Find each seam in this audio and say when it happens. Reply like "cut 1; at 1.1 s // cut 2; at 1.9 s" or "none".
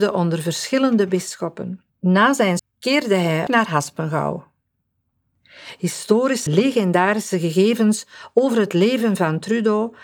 cut 1; at 1.9 s // cut 2; at 2.6 s // cut 3; at 3.5 s // cut 4; at 6.5 s